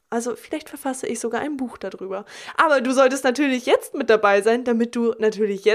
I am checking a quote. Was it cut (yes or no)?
no